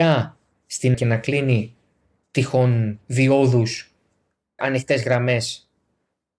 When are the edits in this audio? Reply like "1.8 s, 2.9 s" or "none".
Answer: 0.9 s, 4.6 s